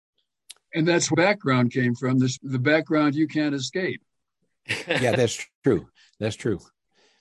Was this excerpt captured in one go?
no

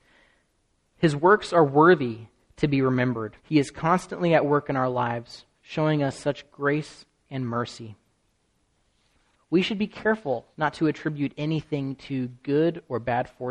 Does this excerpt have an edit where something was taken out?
yes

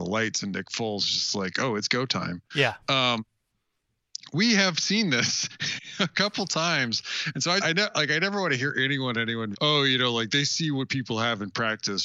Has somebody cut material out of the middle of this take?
yes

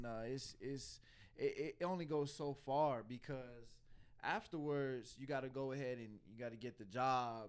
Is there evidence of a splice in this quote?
no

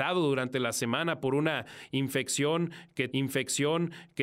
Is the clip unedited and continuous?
no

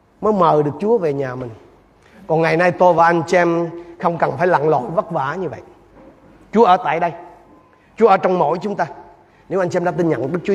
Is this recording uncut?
yes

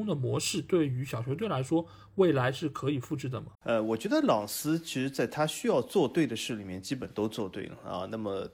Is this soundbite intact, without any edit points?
no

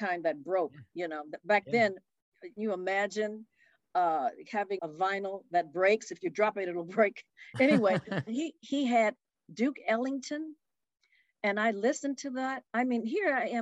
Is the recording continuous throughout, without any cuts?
no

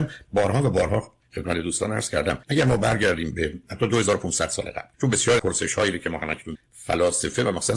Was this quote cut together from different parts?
yes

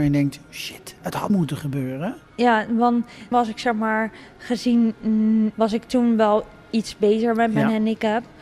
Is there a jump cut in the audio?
yes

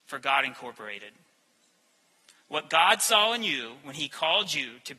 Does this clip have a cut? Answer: no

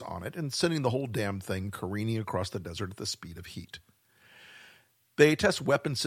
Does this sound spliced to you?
no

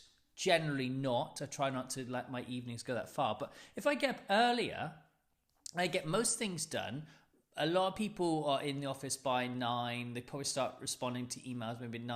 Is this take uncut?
yes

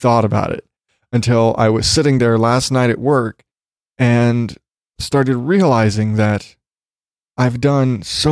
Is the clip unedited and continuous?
yes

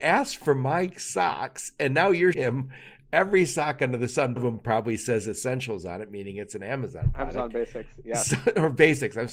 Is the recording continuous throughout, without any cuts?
no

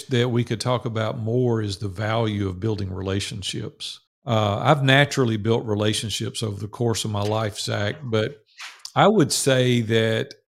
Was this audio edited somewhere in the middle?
yes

